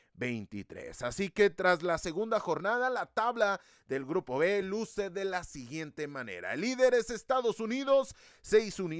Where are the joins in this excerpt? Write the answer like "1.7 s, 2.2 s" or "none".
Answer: none